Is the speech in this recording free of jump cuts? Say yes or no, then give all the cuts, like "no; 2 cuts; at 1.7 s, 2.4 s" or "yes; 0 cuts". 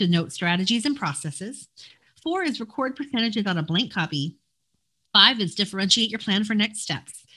yes; 0 cuts